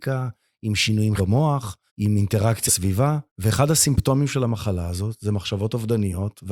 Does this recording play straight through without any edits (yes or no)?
no